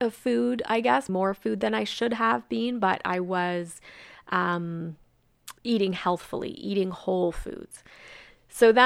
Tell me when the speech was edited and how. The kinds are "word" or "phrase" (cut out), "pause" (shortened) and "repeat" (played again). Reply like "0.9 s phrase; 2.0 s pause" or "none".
1.1 s word; 5.6 s pause